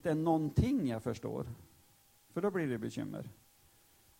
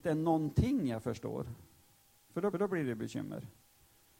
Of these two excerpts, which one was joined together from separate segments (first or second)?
second